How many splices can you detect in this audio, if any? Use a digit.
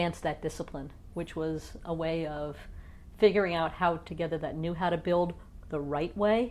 1